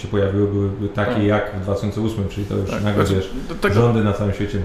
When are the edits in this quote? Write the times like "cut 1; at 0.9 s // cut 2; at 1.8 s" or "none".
none